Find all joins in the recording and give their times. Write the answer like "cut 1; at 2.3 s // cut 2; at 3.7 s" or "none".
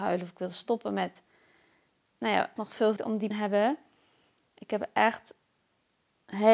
cut 1; at 2.1 s // cut 2; at 2.6 s // cut 3; at 3.0 s // cut 4; at 3.3 s